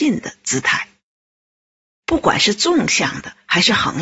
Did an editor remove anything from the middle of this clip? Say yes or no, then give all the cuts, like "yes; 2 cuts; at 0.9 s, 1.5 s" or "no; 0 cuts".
no; 0 cuts